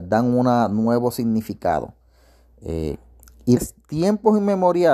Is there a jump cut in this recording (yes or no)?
yes